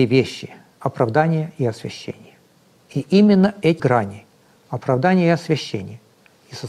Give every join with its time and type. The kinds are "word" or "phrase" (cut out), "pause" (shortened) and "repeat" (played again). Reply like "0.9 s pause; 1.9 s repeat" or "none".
3.8 s word

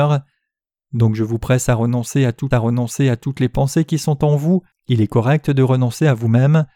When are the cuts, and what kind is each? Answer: 2.5 s repeat; 4.7 s pause

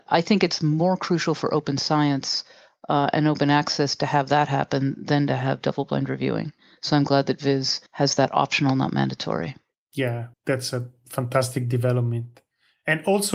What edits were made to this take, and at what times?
7.9 s pause; 10.3 s pause

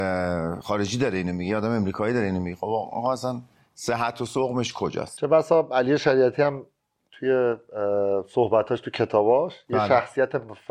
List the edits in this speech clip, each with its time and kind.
none

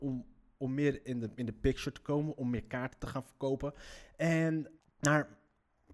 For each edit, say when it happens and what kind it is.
4.8 s pause

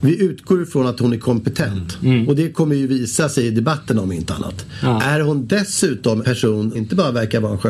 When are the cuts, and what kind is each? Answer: 6.2 s word; 6.8 s word

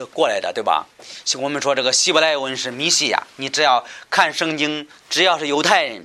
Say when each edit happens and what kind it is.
5.0 s pause

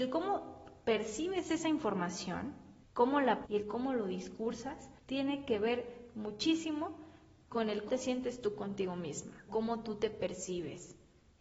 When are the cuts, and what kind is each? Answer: 2.8 s pause; 3.4 s word; 5.0 s pause; 7.9 s word; 9.5 s word

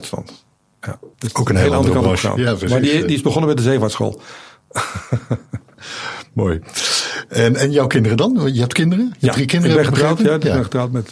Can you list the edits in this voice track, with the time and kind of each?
1.1 s pause

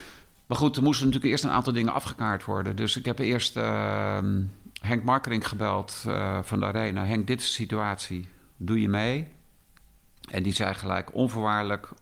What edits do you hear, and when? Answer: none

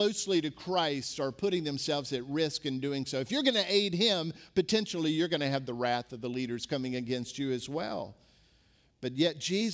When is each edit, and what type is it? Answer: none

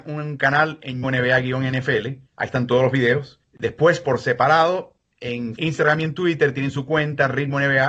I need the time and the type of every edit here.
1.0 s phrase; 2.3 s pause; 3.4 s pause; 5.6 s phrase

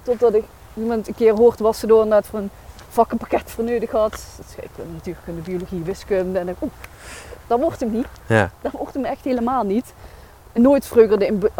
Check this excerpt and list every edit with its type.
10.6 s word

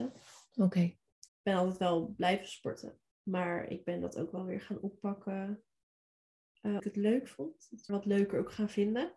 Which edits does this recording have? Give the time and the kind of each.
1.3 s word; 3.1 s pause; 6.8 s phrase; 7.9 s word

